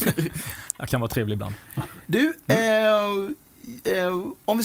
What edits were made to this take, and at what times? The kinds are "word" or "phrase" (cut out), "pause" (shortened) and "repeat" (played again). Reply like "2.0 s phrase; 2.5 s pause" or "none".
2.0 s pause